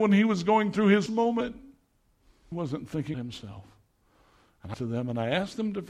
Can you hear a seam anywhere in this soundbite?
yes; 4 cuts; at 1.1 s, 2.5 s, 3.1 s, 4.7 s

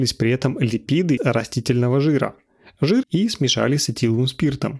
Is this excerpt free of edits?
no; 2 cuts; at 1.2 s, 3.0 s

